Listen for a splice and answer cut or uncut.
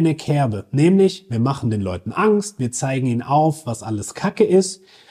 uncut